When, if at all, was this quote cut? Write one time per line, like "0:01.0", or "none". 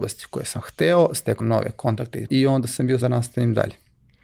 0:01.4
0:02.3
0:03.0